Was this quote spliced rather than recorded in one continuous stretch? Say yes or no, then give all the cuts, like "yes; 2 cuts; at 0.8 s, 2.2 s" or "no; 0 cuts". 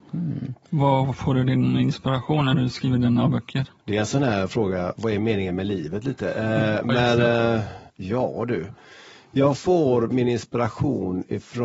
yes; 2 cuts; at 3.8 s, 7.9 s